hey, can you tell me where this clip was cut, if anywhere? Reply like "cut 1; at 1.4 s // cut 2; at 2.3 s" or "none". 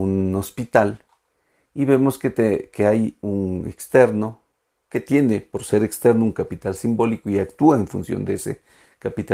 none